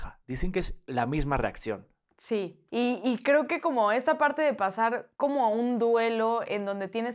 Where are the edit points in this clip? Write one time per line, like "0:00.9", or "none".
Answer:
0:02.7
0:05.1